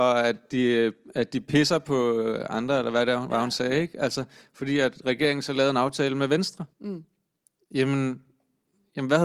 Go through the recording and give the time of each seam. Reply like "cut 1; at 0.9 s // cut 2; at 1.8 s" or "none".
cut 1; at 6.7 s